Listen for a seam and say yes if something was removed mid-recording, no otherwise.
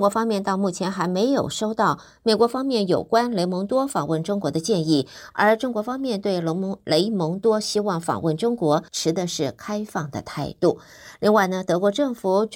yes